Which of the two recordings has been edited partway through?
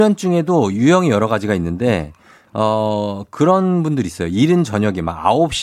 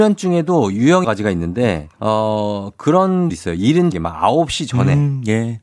second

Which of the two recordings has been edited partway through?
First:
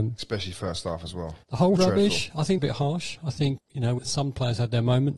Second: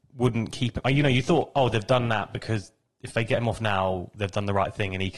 first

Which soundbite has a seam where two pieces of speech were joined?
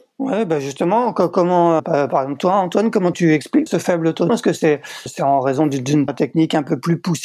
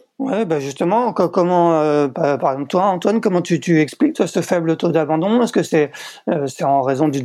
first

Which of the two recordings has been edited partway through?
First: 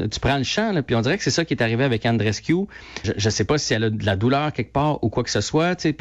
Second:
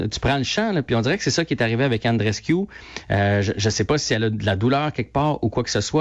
first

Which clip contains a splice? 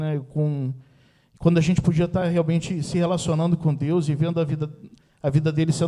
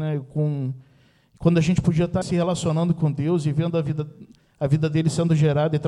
second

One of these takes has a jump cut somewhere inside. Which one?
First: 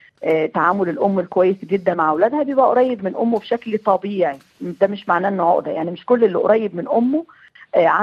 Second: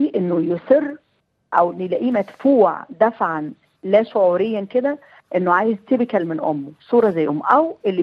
first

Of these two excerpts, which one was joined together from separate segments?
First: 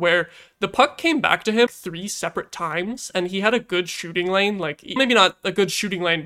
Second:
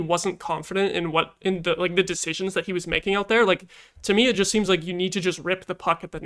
first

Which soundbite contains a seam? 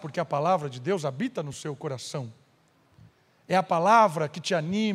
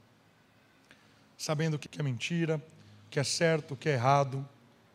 second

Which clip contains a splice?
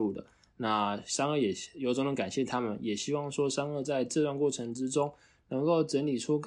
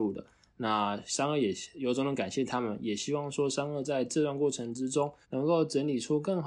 second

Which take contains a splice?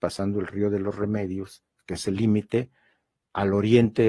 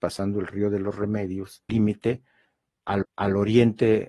second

